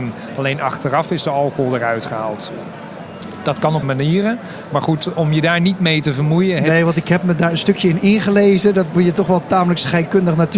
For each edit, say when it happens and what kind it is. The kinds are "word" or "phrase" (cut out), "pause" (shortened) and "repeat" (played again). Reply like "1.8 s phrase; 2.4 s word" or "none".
3.8 s word

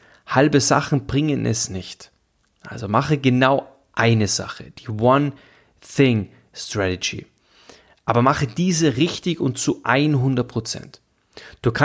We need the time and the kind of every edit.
none

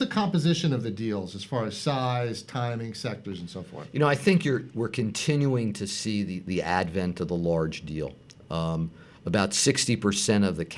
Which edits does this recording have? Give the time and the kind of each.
none

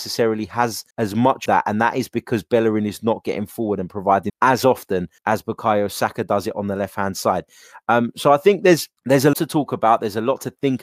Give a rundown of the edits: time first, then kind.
0.9 s pause; 1.5 s word; 4.3 s phrase; 5.2 s pause; 9.0 s pause; 9.3 s word

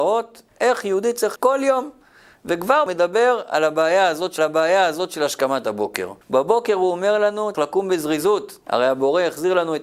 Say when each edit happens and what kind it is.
1.4 s word; 2.9 s phrase; 4.4 s repeat; 6.2 s pause; 7.5 s word; 8.6 s pause

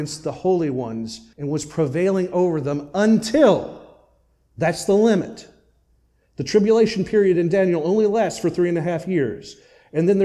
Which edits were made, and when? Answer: 1.3 s pause

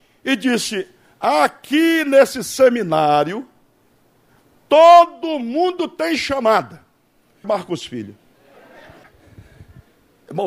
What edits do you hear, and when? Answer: 7.4 s phrase

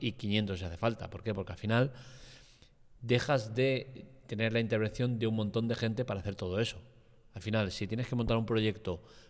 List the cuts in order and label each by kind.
none

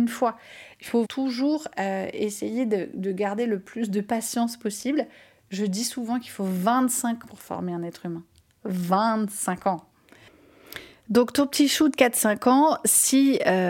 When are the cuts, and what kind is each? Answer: 1.0 s word; 7.2 s word

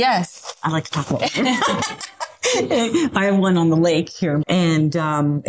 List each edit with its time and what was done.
4.4 s word

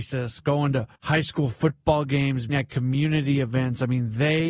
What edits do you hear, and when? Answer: 1.0 s pause; 2.5 s word

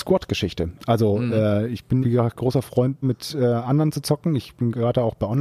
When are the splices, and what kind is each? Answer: 2.0 s word; 2.4 s word; 3.0 s word

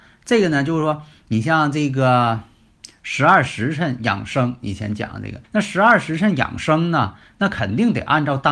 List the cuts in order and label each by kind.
5.4 s pause

